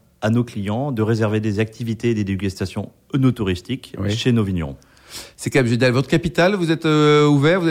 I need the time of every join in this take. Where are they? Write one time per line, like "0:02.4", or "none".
none